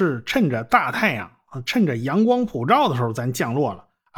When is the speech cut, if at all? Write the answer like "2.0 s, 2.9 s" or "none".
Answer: none